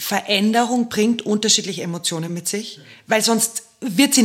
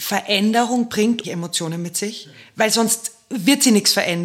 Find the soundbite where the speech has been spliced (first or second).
second